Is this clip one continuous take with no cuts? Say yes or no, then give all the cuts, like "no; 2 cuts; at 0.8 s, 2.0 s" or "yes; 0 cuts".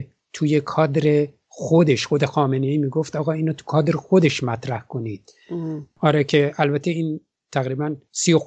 yes; 0 cuts